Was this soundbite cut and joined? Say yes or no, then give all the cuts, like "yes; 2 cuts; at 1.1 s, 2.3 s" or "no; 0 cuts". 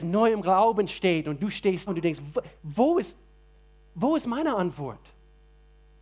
yes; 2 cuts; at 1.9 s, 2.6 s